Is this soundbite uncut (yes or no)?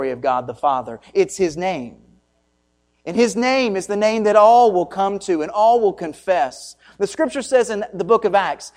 yes